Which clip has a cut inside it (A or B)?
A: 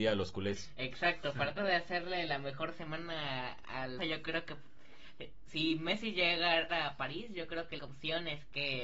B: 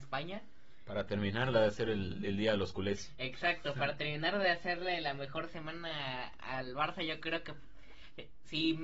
A